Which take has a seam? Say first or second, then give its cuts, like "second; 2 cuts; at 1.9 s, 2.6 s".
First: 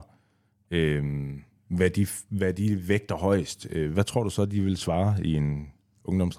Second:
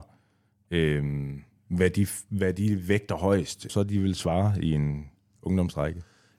second; 1 cut; at 3.7 s